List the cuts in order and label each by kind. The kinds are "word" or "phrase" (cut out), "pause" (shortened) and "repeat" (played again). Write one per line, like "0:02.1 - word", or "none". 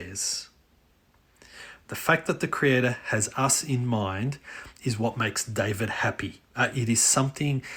0:06.4 - pause